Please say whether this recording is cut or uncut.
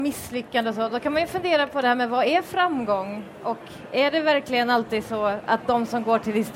uncut